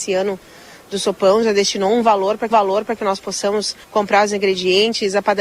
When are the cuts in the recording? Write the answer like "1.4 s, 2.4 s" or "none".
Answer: 2.5 s, 3.8 s